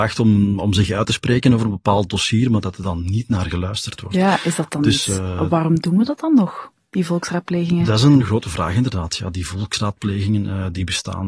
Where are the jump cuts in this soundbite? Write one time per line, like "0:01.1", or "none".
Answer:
none